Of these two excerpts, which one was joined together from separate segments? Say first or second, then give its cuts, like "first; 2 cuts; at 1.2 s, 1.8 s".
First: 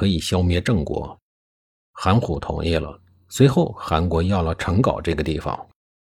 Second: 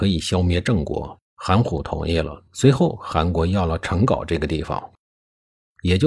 second; 2 cuts; at 1.2 s, 2.5 s